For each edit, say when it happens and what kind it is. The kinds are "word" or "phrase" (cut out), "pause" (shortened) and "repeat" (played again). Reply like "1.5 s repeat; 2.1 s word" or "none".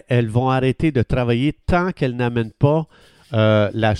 none